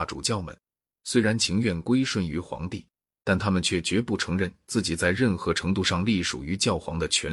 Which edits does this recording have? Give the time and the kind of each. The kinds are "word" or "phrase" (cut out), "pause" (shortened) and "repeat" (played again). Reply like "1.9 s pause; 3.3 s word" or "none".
none